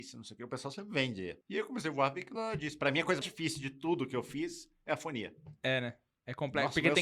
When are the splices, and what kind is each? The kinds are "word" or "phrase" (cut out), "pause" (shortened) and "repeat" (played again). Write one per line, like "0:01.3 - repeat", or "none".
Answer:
0:01.4 - pause
0:02.4 - word
0:03.2 - word